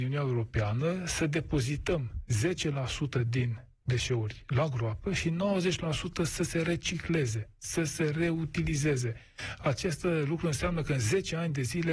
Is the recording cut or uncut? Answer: uncut